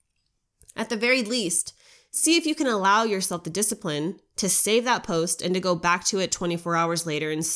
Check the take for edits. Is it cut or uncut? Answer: uncut